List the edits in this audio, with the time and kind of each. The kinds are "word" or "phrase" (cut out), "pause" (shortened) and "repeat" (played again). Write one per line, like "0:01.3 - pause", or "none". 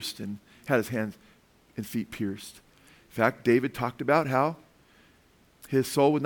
none